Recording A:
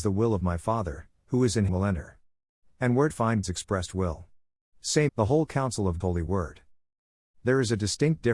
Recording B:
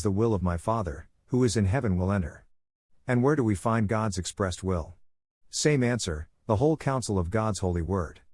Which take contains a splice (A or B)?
A